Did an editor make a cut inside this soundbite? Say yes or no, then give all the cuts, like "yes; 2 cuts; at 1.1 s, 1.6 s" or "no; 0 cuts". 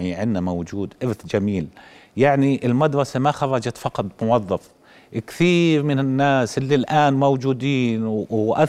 no; 0 cuts